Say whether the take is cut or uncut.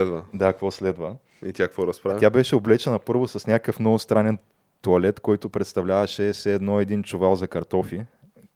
uncut